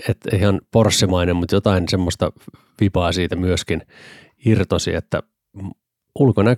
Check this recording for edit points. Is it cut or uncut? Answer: uncut